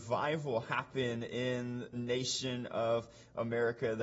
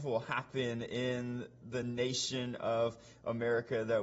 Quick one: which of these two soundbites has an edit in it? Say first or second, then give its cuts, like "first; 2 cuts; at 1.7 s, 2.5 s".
first; 1 cut; at 1.9 s